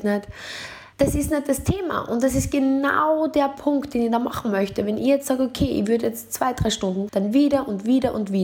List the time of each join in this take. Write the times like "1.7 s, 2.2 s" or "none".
0.9 s, 7.1 s